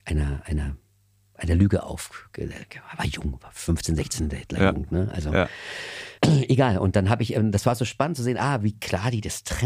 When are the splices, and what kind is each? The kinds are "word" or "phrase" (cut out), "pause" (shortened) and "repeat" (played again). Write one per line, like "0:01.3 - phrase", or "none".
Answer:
0:06.2 - pause